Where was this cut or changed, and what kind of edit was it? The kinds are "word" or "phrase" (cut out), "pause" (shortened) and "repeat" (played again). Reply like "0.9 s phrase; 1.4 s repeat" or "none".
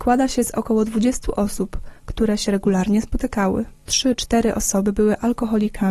2.0 s pause; 3.8 s pause